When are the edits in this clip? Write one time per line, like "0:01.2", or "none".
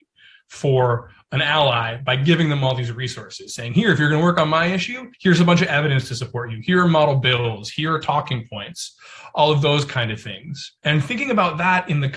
0:05.1
0:10.8